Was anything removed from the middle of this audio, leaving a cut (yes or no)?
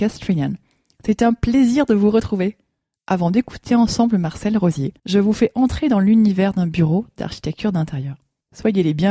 yes